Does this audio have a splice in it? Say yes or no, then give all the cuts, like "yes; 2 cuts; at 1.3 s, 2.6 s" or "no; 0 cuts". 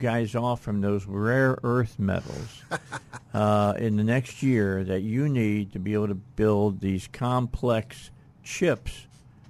no; 0 cuts